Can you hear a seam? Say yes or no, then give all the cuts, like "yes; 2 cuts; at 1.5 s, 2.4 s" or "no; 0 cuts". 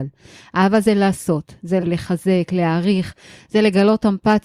yes; 1 cut; at 1.8 s